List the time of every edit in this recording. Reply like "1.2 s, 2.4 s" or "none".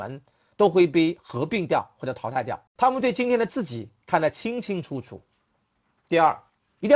2.7 s